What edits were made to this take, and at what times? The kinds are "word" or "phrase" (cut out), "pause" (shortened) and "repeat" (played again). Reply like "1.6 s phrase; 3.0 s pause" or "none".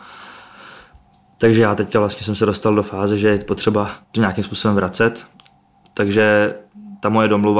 4.0 s pause

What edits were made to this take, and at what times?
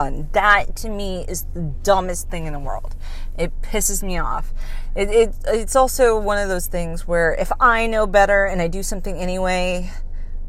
none

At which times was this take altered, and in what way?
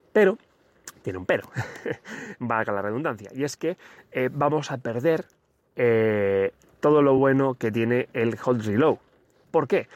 none

